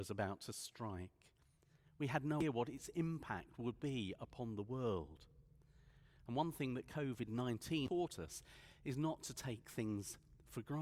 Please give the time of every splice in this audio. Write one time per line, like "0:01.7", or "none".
none